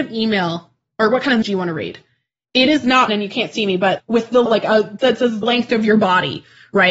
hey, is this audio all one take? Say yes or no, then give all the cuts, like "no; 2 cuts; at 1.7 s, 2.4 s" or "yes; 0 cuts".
no; 6 cuts; at 1.4 s, 3.1 s, 4.0 s, 4.5 s, 5.0 s, 5.4 s